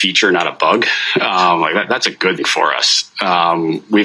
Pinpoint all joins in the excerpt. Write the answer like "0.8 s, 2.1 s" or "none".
2.4 s